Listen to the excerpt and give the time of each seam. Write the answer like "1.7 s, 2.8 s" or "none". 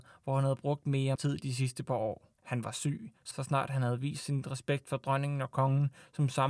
1.1 s, 2.4 s, 3.3 s

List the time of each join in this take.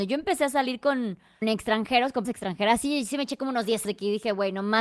1.4 s, 2.2 s, 3.8 s

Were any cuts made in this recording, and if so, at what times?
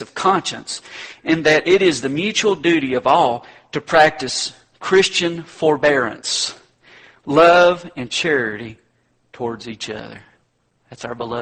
none

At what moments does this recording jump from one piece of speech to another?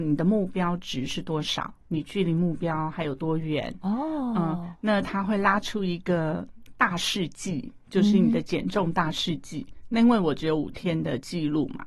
1.8 s

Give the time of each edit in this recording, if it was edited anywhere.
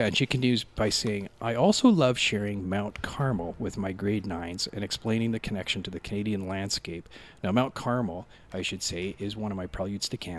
none

